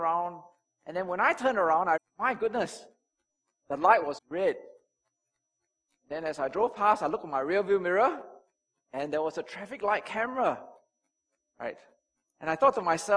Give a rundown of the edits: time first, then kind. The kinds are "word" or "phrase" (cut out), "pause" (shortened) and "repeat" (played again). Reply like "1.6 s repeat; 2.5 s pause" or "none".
2.0 s word; 4.2 s word